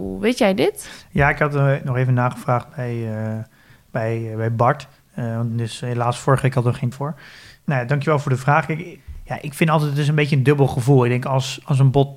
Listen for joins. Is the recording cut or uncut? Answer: cut